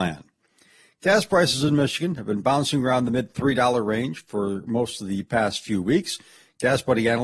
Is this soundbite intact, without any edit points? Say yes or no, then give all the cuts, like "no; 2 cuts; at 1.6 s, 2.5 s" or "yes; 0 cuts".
yes; 0 cuts